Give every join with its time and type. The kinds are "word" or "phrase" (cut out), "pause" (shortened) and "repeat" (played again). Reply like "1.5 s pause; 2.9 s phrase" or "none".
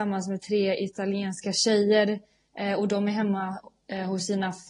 none